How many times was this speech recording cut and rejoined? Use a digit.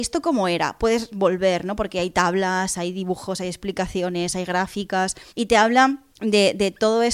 2